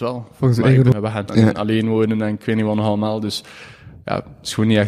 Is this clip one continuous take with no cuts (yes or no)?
no